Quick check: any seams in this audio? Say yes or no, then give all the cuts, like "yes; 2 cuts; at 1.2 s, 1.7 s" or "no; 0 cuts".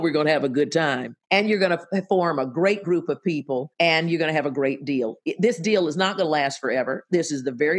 yes; 2 cuts; at 1.2 s, 3.7 s